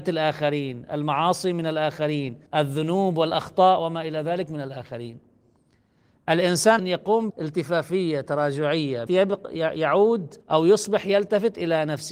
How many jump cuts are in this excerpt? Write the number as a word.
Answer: five